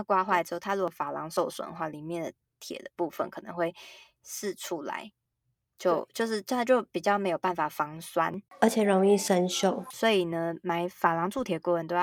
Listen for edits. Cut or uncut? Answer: uncut